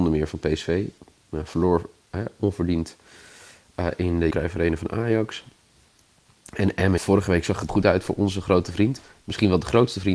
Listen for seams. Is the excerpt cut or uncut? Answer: cut